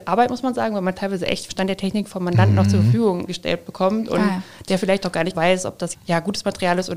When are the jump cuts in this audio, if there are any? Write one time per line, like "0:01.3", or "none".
0:01.5
0:03.3
0:05.3
0:05.9